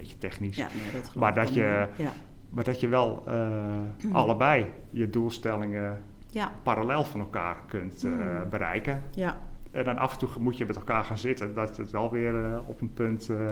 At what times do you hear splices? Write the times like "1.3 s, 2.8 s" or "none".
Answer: none